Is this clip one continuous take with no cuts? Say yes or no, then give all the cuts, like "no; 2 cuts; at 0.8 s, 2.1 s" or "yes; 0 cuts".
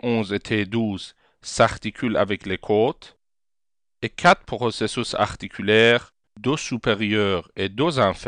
yes; 0 cuts